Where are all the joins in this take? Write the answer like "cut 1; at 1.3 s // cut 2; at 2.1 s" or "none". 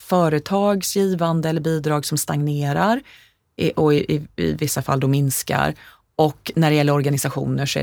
none